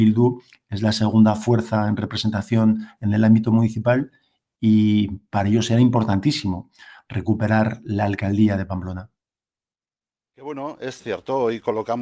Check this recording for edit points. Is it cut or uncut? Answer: uncut